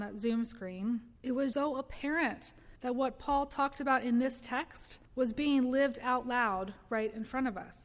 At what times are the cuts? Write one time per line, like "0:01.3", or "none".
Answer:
0:01.2
0:01.5
0:02.8
0:05.1